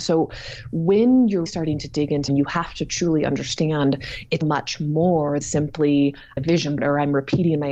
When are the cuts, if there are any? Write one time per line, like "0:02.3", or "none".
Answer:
0:01.5
0:02.3
0:04.4
0:05.4
0:06.4
0:06.8